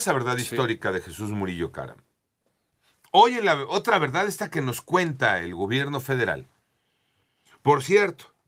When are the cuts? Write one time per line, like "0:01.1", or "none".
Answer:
none